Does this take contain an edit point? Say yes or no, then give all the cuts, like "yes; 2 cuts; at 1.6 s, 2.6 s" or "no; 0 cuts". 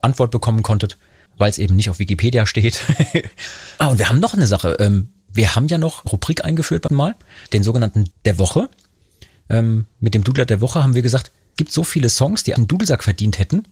yes; 7 cuts; at 1.3 s, 6.1 s, 6.9 s, 7.5 s, 8.1 s, 11.6 s, 12.6 s